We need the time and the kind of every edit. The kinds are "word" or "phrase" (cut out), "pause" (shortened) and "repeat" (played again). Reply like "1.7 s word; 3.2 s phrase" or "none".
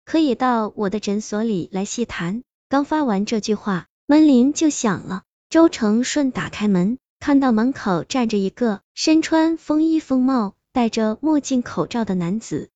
8.8 s pause